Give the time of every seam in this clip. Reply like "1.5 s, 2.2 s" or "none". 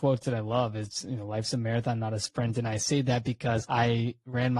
none

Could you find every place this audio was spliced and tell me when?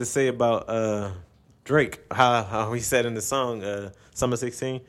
1.3 s

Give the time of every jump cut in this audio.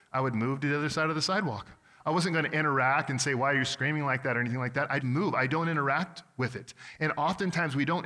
5.0 s

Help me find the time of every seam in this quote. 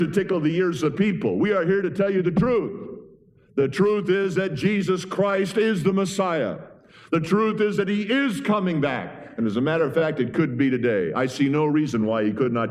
none

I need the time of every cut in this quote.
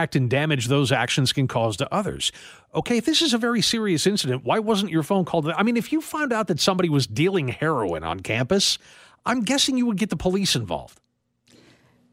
none

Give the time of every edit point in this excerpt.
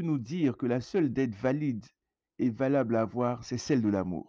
none

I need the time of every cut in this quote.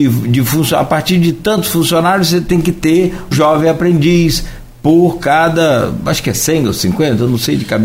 3.3 s

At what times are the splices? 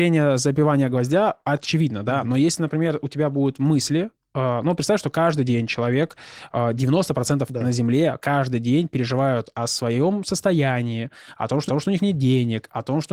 7.5 s, 11.7 s

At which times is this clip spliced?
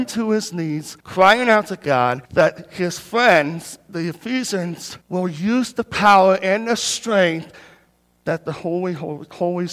1.0 s, 2.3 s, 5.0 s

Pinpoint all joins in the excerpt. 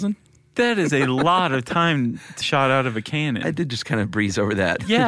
2.4 s

